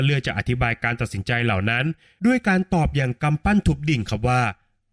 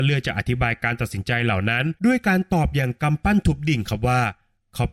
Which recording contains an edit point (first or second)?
second